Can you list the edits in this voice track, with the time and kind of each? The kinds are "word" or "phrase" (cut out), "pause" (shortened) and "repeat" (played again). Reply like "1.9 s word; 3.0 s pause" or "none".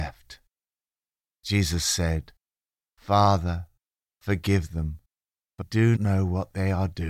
5.6 s word; 6.0 s word